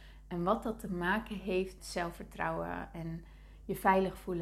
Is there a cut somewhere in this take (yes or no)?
yes